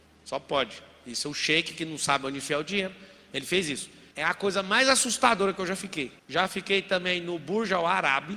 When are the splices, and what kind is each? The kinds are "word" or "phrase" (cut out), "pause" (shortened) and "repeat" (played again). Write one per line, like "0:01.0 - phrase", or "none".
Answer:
0:04.1 - pause
0:06.2 - pause